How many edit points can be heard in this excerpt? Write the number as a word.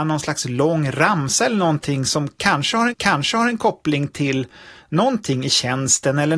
one